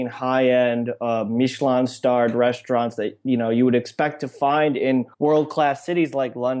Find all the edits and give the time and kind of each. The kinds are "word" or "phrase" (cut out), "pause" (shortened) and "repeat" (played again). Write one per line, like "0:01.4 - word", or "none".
0:05.1 - pause